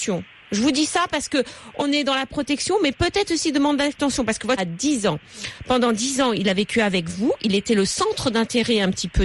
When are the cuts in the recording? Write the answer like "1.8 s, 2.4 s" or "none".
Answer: 1.8 s, 4.6 s

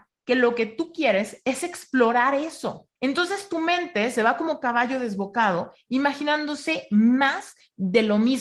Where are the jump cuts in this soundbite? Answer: 3.0 s

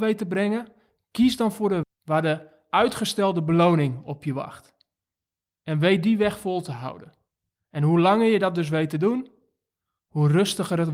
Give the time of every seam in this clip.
1.8 s

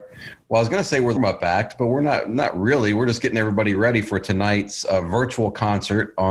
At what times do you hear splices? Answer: 1.2 s

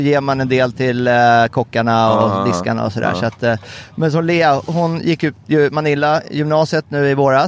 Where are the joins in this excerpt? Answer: none

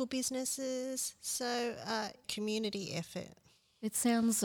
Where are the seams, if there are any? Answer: 2.2 s

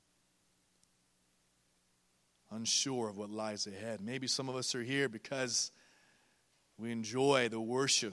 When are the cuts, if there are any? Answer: none

